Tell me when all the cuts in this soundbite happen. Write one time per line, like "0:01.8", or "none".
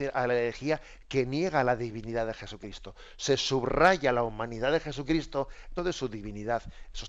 0:05.8